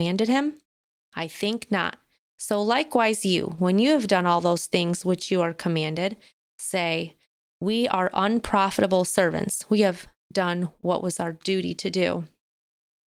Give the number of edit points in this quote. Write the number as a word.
zero